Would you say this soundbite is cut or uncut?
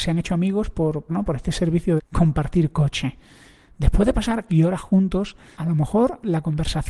cut